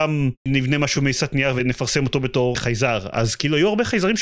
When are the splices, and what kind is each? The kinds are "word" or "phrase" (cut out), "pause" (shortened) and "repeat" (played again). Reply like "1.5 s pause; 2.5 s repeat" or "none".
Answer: none